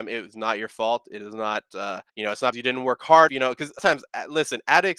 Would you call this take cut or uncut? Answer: cut